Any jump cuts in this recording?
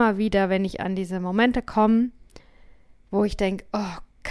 no; 0 cuts

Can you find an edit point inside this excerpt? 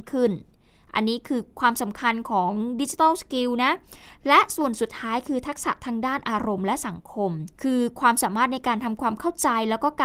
yes; 1 cut; at 7.5 s

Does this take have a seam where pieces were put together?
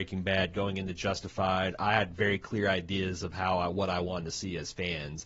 no; 0 cuts

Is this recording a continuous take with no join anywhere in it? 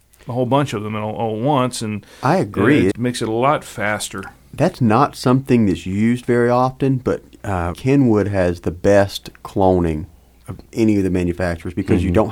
no; 2 cuts; at 2.9 s, 7.7 s

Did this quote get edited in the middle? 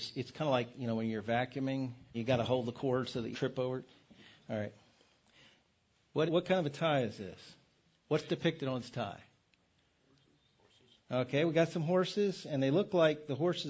yes; 3 cuts; at 2.1 s, 3.3 s, 6.3 s

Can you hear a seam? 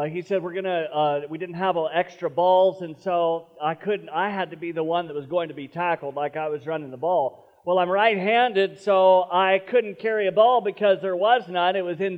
no; 0 cuts

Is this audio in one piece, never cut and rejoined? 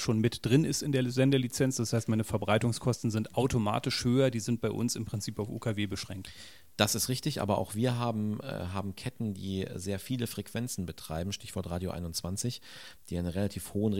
yes; 0 cuts

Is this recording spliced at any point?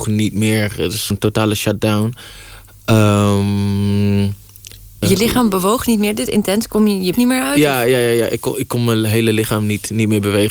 yes; 4 cuts; at 1.1 s, 5.0 s, 6.3 s, 7.1 s

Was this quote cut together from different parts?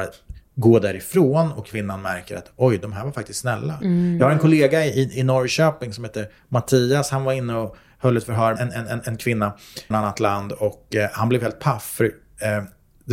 yes; 2 cuts; at 8.6 s, 9.9 s

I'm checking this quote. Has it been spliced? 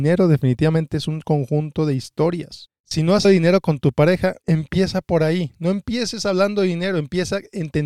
yes; 2 cuts; at 3.2 s, 4.4 s

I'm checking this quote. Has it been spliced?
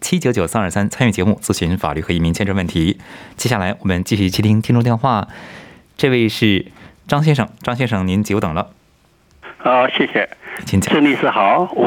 no; 0 cuts

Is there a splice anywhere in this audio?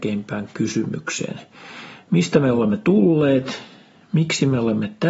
no; 0 cuts

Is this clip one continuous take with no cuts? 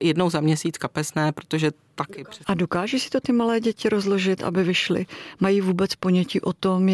yes; 0 cuts

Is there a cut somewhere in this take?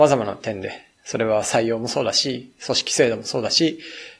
yes; 1 cut; at 0.9 s

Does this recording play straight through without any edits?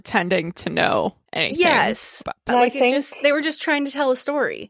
no; 2 cuts; at 1.3 s, 2.5 s

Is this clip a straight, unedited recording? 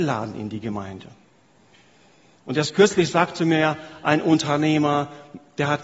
yes; 0 cuts

